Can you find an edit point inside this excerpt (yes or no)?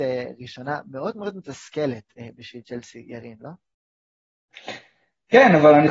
no